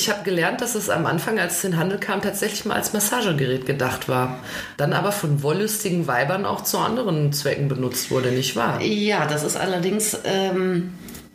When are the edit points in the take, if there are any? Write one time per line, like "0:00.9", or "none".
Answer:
none